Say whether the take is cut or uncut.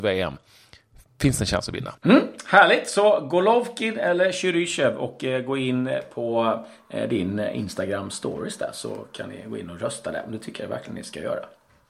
cut